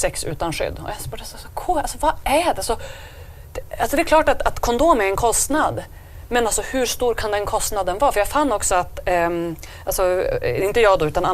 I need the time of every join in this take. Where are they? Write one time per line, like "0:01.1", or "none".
none